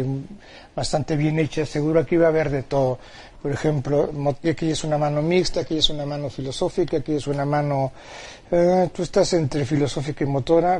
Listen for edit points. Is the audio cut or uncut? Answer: cut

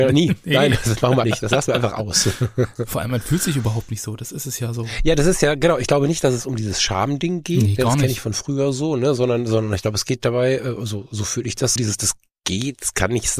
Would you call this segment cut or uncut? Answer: cut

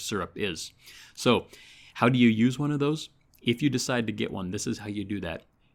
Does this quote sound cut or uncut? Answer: uncut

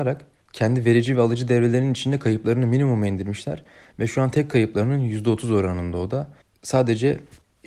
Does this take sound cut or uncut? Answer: uncut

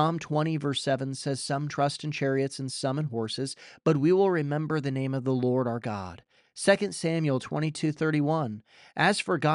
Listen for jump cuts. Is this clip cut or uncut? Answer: uncut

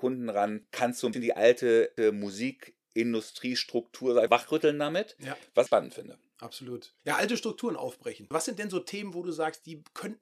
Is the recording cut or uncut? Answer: cut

